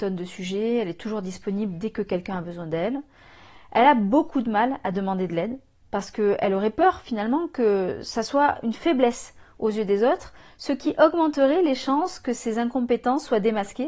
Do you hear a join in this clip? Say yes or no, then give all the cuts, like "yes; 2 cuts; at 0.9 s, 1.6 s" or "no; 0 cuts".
no; 0 cuts